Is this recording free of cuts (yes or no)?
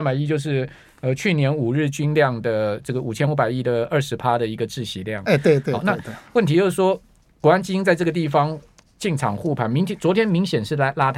yes